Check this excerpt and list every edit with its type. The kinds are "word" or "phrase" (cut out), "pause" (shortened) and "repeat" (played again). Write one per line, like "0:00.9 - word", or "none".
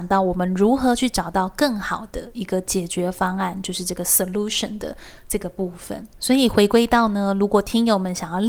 0:06.1 - pause

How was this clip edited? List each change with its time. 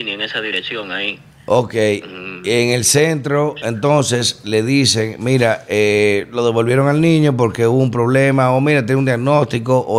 none

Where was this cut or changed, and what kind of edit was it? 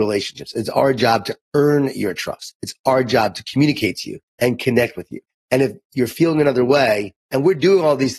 0:04.3 - pause
0:05.3 - pause
0:07.2 - pause

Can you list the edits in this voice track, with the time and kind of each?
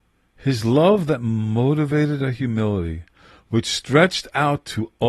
none

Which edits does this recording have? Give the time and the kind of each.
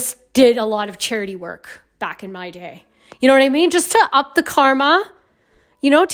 none

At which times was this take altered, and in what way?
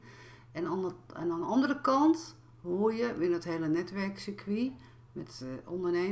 none

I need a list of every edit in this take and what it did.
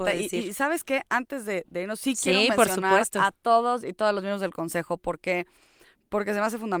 none

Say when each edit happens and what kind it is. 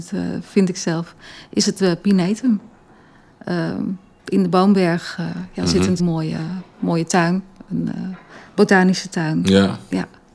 0:06.0 - phrase

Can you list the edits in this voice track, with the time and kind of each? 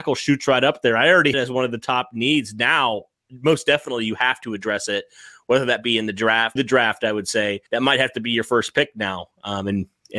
0:01.3 - phrase
0:06.6 - word
0:07.7 - pause

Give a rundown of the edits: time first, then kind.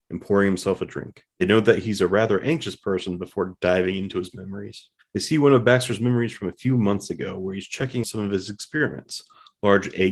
0:01.3 - pause
0:05.0 - pause
0:08.0 - word

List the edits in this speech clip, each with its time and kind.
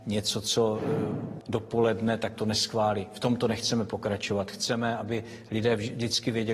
0:01.4 - word
0:02.3 - word

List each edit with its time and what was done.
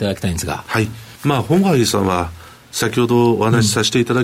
0:01.2 - pause

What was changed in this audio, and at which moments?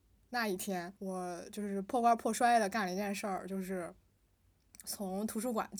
0:01.0 - pause

